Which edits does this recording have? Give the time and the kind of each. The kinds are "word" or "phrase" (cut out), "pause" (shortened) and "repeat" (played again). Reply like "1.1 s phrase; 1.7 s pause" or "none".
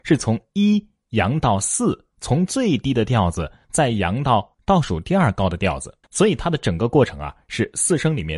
4.5 s pause; 6.0 s pause

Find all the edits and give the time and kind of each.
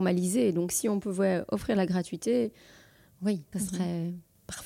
3.5 s word

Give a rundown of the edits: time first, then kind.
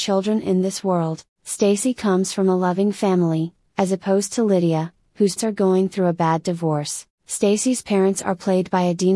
1.3 s pause; 5.4 s word; 7.1 s pause

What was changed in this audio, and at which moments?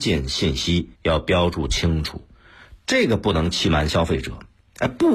1.0 s pause

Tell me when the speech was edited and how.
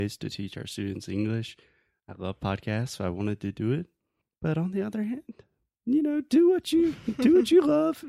none

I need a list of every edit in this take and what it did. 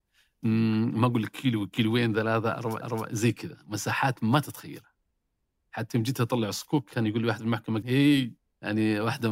2.8 s repeat; 7.8 s word; 8.4 s pause

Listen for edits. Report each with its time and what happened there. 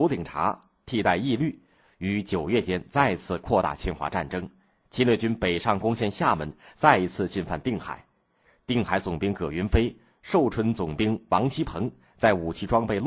none

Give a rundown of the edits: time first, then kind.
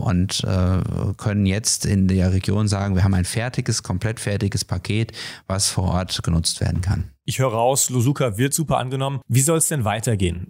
none

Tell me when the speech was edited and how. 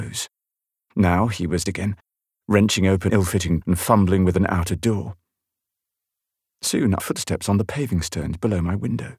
1.7 s word; 3.1 s word; 3.6 s word; 7.0 s word

